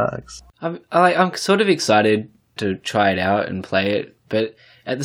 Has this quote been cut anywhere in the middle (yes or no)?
yes